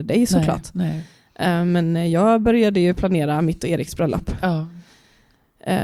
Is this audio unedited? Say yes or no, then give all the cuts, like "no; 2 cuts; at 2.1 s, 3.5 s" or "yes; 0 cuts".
yes; 0 cuts